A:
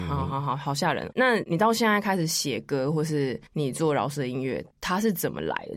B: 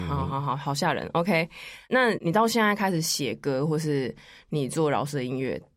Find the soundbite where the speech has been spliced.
A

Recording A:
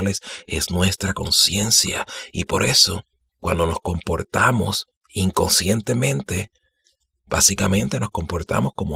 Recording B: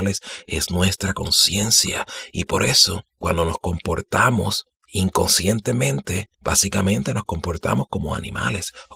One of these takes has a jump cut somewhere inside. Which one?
B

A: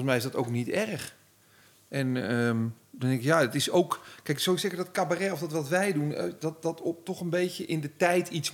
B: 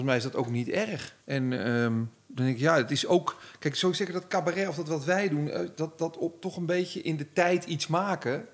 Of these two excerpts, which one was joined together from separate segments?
B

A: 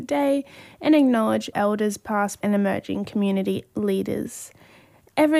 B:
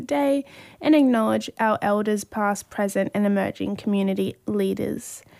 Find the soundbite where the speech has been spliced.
A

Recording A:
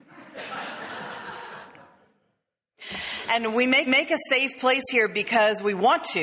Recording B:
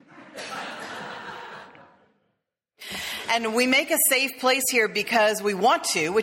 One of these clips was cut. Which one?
A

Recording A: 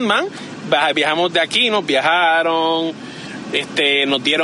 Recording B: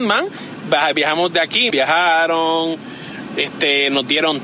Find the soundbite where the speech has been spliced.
B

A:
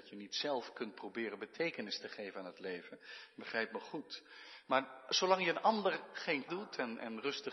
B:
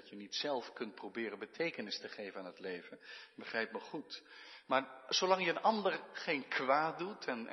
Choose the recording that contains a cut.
A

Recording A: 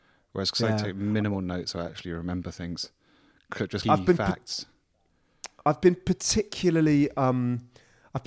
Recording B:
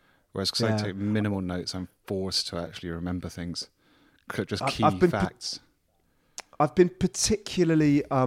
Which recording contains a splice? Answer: A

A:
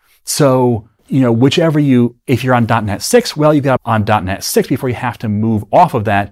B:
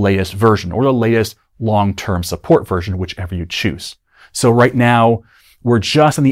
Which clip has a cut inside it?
A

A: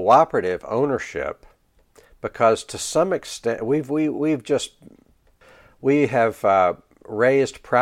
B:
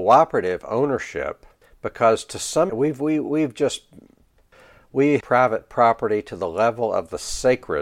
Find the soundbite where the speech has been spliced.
B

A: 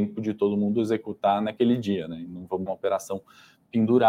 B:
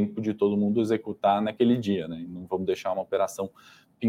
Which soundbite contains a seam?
A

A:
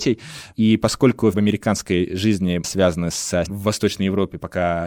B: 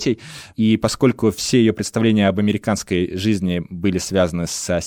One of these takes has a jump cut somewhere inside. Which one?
A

